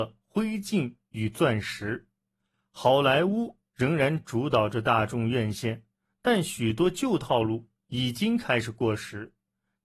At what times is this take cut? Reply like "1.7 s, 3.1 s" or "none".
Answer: none